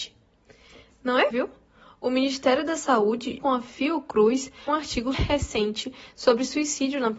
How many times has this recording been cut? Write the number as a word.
four